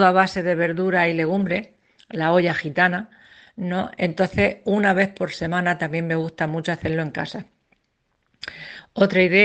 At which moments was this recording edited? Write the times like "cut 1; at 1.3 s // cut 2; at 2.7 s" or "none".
none